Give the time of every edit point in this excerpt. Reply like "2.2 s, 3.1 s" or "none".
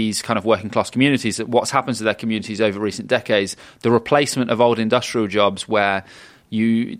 none